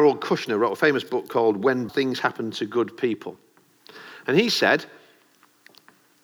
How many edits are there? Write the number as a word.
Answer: one